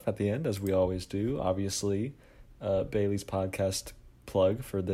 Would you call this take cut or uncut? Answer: uncut